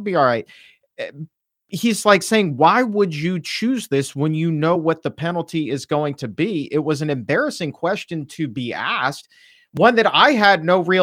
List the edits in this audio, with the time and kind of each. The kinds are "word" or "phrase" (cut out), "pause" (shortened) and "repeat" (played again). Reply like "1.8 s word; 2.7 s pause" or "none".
none

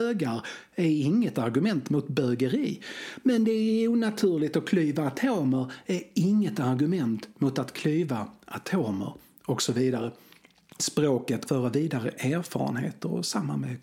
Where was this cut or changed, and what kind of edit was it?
11.5 s phrase

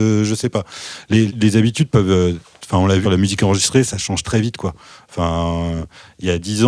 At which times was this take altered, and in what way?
1.3 s word; 3.0 s word; 3.8 s word; 4.2 s word

